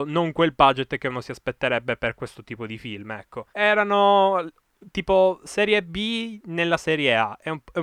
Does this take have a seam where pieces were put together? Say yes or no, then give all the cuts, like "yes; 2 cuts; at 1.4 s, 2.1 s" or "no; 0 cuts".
yes; 1 cut; at 3.5 s